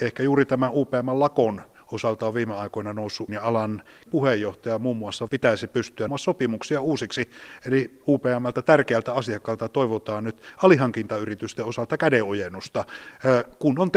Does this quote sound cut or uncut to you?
cut